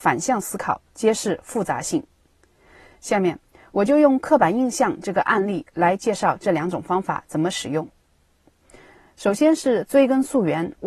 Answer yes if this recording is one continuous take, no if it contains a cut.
yes